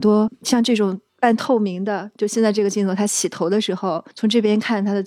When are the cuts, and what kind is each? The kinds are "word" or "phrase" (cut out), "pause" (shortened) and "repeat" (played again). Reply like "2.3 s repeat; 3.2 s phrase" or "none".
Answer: 1.1 s pause; 4.1 s pause

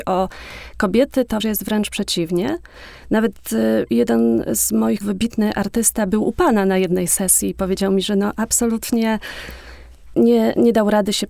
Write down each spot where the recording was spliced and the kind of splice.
1.4 s word; 5.0 s word; 10.1 s word

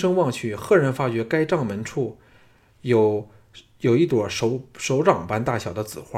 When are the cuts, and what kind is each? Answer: none

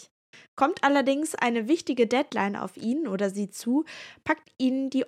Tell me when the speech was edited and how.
none

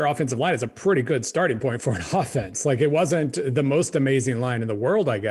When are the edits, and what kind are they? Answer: none

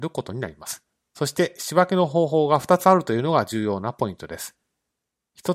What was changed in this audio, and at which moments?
none

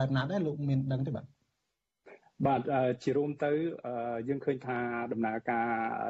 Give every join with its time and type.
none

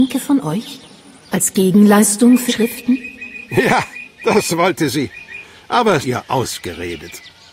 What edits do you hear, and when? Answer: 2.5 s word; 6.0 s phrase

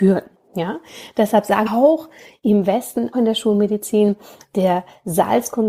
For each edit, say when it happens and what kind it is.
1.7 s word; 3.1 s word

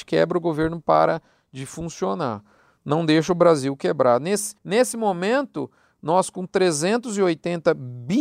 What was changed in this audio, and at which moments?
4.6 s pause

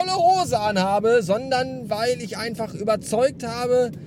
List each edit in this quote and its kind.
none

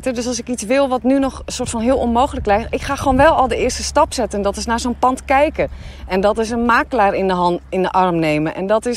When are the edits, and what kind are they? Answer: none

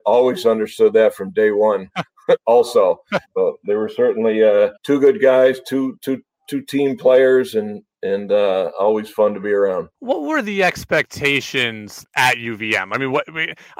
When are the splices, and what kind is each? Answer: 3.2 s pause; 4.8 s pause; 9.9 s pause; 12.0 s word

